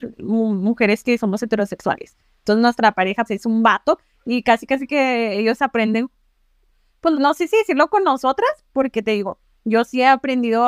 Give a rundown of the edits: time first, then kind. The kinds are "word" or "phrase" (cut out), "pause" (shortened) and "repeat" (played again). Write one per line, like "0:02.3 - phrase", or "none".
0:03.3 - word
0:07.1 - word